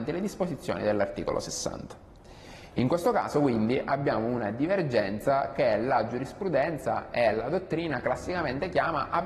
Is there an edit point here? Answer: no; 0 cuts

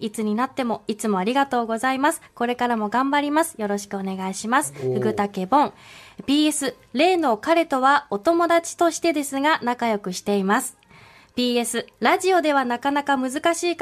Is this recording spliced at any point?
yes; 2 cuts; at 6.8 s, 11.9 s

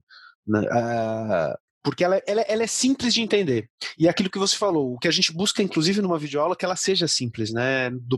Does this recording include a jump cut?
yes; 1 cut; at 1.7 s

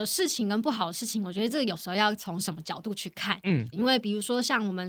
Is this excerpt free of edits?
no; 1 cut; at 3.7 s

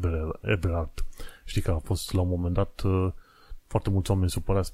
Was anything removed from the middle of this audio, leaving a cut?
yes; 1 cut; at 3.6 s

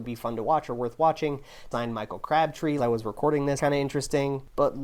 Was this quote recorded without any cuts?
no; 3 cuts; at 1.7 s, 2.8 s, 3.6 s

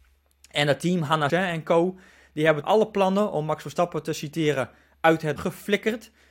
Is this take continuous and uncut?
no; 3 cuts; at 1.3 s, 2.6 s, 5.4 s

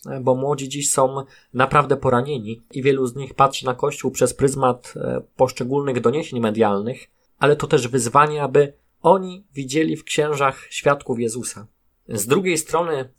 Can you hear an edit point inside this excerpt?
no; 0 cuts

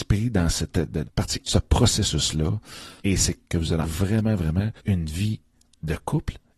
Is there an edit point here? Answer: yes; 6 cuts; at 1.0 s, 1.4 s, 3.0 s, 3.4 s, 3.8 s, 4.8 s

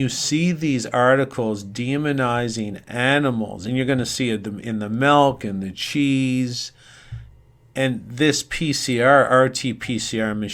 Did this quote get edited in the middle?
no; 0 cuts

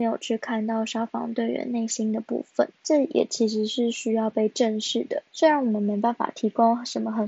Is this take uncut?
no; 2 cuts; at 2.8 s, 5.3 s

